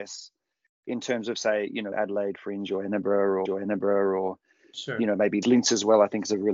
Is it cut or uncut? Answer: cut